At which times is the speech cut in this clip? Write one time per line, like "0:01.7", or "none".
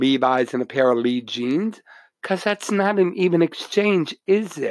none